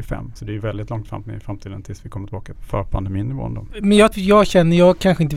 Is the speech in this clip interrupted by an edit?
yes; 2 cuts; at 2.5 s, 4.1 s

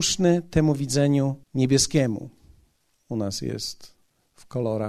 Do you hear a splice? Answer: yes; 1 cut; at 1.4 s

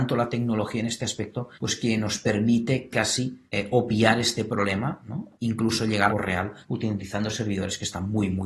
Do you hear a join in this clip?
yes; 6 cuts; at 1.5 s, 2.9 s, 3.5 s, 5.3 s, 6.1 s, 6.6 s

